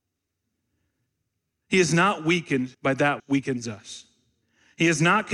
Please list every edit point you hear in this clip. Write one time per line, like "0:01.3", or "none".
0:02.7
0:03.2